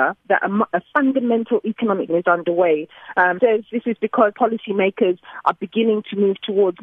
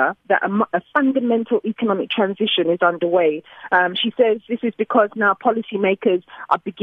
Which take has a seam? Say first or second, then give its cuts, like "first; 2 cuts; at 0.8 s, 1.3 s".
first; 3 cuts; at 2.1 s, 3.4 s, 4.3 s